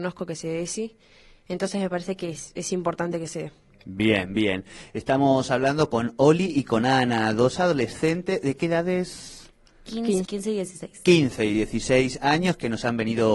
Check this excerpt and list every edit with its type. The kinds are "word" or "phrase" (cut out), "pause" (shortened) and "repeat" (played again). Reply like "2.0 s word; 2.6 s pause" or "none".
10.3 s word

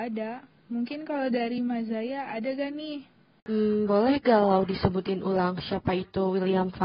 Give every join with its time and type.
none

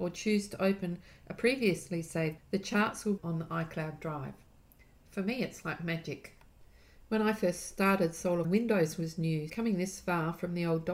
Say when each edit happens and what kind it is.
2.4 s word; 3.2 s word; 8.4 s word; 9.5 s word

